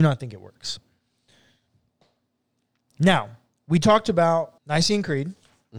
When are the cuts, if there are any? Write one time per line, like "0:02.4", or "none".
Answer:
0:04.6